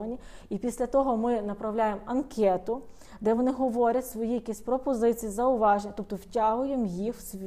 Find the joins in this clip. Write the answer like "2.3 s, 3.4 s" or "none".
none